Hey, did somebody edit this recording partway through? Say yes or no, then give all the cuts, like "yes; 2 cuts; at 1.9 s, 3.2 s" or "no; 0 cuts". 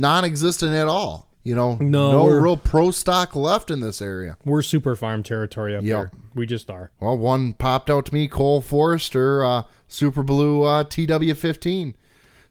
yes; 2 cuts; at 1.3 s, 6.9 s